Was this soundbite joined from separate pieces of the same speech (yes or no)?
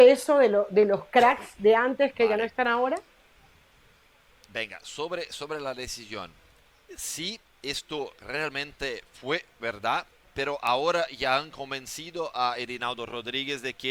no